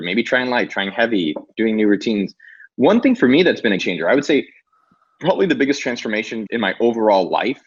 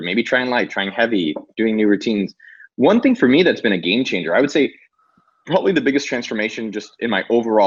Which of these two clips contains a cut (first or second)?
first